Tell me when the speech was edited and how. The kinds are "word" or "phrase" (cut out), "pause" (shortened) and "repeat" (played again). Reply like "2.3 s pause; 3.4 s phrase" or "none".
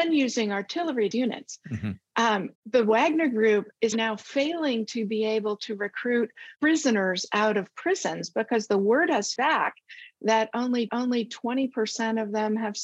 1.1 s phrase; 2.5 s pause; 3.9 s word; 6.6 s pause; 9.4 s word; 10.9 s repeat